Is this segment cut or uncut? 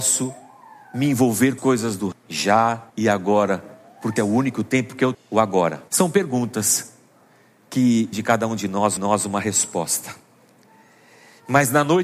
cut